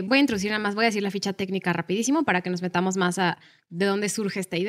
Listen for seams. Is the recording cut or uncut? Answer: uncut